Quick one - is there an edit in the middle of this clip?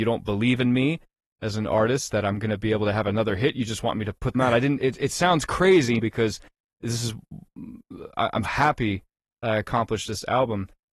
yes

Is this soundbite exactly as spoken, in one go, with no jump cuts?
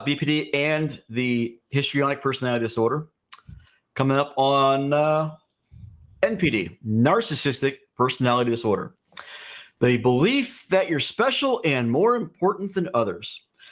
yes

